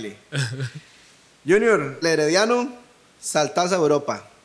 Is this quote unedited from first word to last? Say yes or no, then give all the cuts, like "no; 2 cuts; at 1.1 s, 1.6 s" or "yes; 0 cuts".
no; 1 cut; at 2.0 s